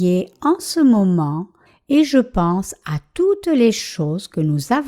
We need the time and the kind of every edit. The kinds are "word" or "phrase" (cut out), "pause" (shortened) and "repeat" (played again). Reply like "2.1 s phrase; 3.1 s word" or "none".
none